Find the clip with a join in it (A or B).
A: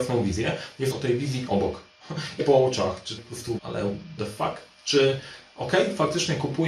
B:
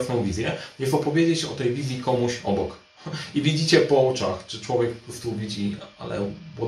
A